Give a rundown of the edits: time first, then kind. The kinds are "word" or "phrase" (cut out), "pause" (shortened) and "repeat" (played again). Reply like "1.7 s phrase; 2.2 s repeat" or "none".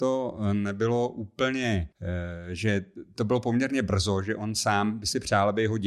1.9 s pause